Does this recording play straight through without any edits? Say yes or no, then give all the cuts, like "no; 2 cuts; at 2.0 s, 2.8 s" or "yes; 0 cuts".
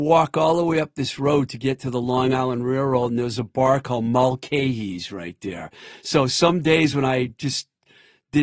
yes; 0 cuts